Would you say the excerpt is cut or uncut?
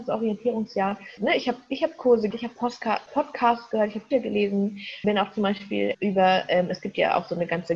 cut